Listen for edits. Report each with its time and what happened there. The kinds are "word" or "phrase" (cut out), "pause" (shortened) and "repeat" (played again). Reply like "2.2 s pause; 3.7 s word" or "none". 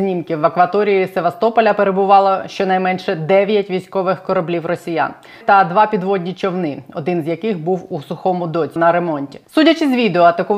5.4 s phrase; 8.8 s word